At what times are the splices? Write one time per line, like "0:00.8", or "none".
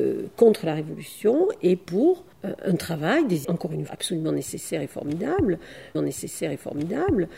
0:02.3
0:03.4
0:03.9
0:05.9